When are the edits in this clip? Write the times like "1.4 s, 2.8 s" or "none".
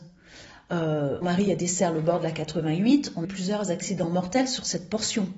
1.2 s, 3.2 s